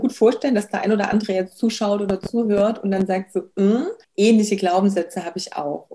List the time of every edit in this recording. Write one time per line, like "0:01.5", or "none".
0:04.0